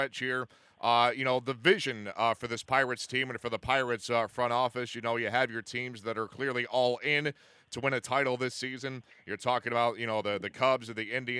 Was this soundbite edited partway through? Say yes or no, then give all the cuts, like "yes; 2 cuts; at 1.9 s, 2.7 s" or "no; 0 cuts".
no; 0 cuts